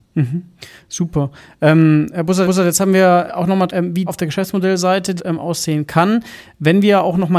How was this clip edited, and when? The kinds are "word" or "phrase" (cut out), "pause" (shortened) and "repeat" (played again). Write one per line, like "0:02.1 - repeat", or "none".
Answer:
0:02.4 - repeat
0:03.3 - word
0:03.7 - phrase
0:04.1 - word
0:05.2 - phrase